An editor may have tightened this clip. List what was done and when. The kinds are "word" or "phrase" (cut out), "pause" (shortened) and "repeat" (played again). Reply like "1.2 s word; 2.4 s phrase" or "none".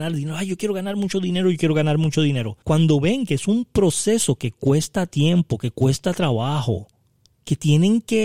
2.6 s pause